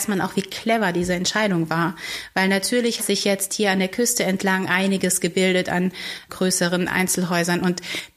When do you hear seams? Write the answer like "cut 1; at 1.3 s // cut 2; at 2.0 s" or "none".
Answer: cut 1; at 3.0 s // cut 2; at 6.3 s